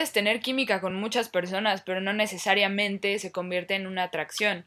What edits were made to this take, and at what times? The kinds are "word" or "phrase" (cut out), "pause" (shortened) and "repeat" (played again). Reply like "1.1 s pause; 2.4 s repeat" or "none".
none